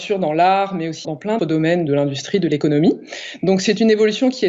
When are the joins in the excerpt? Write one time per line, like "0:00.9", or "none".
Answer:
0:01.0
0:01.4
0:01.9